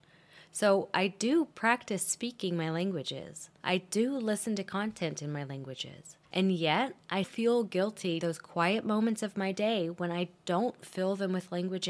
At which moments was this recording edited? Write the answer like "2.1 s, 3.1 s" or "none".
3.6 s, 6.2 s, 7.2 s, 8.2 s